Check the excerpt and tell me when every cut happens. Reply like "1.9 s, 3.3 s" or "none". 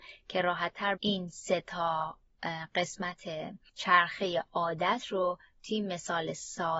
1.0 s